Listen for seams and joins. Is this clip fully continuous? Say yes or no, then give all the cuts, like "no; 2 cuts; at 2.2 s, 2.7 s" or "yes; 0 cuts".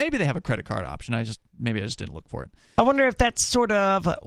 yes; 0 cuts